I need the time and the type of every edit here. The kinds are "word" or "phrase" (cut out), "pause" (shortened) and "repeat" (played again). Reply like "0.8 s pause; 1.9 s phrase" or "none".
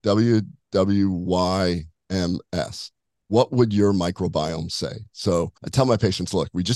5.6 s pause

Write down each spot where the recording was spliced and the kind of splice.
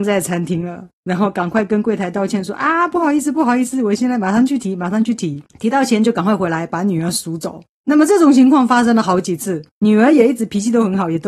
1.0 s pause; 5.5 s pause

